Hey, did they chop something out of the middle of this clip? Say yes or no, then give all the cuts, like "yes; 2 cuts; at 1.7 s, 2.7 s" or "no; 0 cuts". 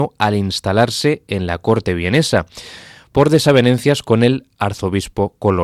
no; 0 cuts